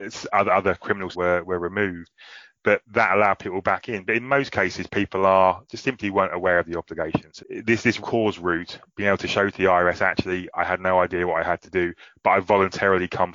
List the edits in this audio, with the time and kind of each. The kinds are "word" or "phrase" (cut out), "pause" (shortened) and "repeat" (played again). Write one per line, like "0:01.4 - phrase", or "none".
0:01.1 - word
0:02.8 - pause
0:07.4 - word
0:08.0 - word